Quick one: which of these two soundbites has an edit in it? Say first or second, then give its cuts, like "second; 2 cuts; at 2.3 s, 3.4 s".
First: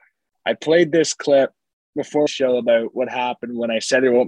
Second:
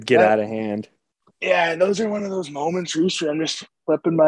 first; 1 cut; at 2.3 s